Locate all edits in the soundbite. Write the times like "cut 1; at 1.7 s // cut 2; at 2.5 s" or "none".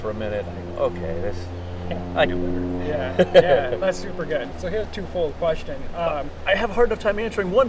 cut 1; at 2.3 s // cut 2; at 3.8 s // cut 3; at 4.8 s